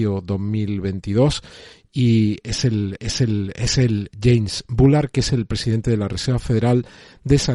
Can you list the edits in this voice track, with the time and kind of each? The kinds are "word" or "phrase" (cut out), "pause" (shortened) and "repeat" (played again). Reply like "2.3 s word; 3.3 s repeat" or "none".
3.0 s repeat